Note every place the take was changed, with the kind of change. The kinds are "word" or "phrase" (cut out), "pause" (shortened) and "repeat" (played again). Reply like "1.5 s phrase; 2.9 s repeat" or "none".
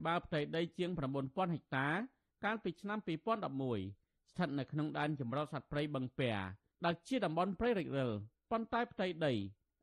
none

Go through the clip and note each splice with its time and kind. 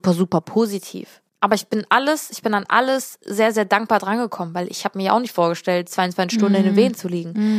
1.3 s pause

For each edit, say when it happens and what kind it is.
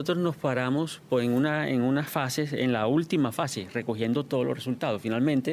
none

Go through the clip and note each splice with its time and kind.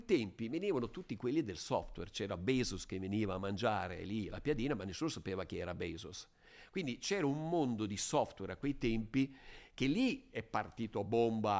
none

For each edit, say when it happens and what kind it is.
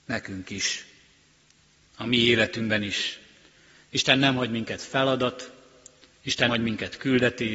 6.5 s word

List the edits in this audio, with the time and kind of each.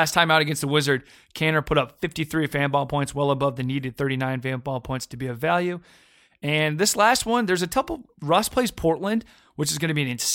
none

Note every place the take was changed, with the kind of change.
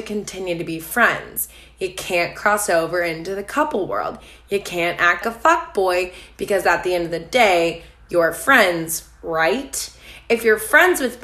5.2 s word

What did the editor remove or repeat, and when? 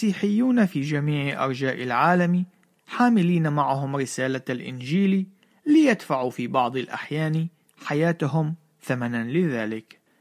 none

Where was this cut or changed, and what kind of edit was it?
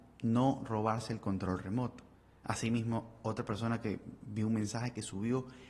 2.1 s pause

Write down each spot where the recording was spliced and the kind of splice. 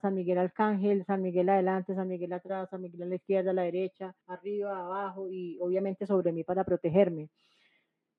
4.2 s pause

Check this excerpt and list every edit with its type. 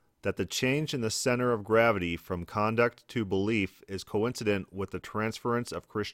none

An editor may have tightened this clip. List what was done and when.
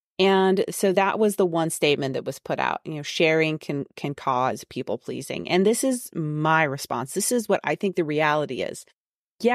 none

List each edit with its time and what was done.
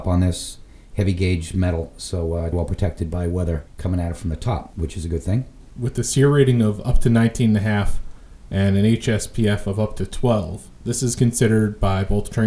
2.5 s word

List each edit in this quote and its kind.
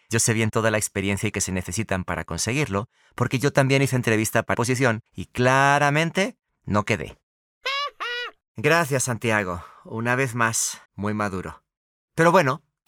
1.3 s word; 4.5 s phrase; 5.1 s pause; 10.9 s pause

